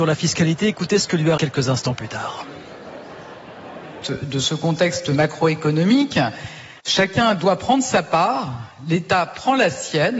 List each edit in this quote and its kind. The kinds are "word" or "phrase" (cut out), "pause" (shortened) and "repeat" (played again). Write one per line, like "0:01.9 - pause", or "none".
0:01.4 - phrase
0:04.0 - phrase
0:06.8 - pause